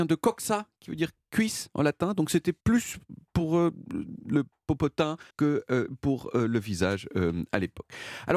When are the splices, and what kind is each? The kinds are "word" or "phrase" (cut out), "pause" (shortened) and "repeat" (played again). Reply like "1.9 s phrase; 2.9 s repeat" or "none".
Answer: 2.6 s pause; 5.3 s pause